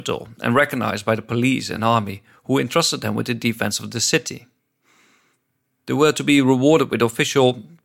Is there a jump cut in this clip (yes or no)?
no